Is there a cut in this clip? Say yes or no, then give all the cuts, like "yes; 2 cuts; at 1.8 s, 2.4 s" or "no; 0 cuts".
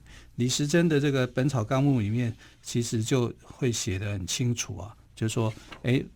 no; 0 cuts